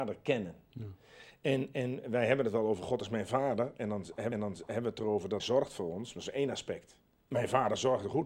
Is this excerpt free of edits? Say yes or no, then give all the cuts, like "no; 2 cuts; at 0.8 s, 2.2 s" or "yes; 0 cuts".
no; 3 cuts; at 4.3 s, 5.4 s, 7.2 s